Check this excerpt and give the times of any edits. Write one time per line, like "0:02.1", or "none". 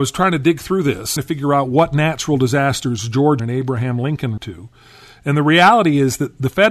0:01.2
0:03.4
0:04.4